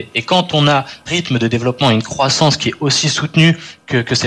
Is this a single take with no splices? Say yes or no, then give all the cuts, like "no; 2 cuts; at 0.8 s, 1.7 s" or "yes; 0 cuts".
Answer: no; 1 cut; at 1.1 s